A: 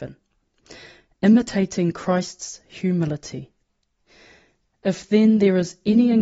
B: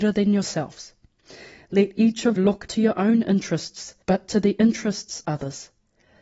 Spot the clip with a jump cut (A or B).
B